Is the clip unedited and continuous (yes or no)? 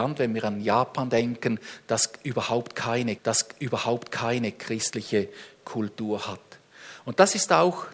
no